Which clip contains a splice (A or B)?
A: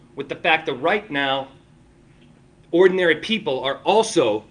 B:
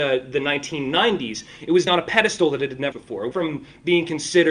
B